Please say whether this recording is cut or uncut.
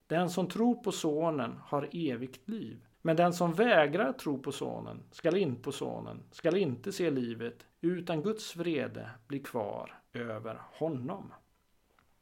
cut